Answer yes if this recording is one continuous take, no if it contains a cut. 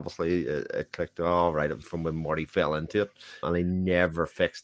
no